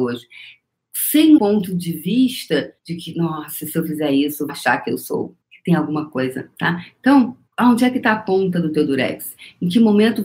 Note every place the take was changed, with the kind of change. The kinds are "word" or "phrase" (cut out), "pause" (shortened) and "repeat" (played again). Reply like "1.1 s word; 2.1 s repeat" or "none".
1.4 s word; 2.8 s pause; 4.5 s word; 5.4 s pause; 7.5 s pause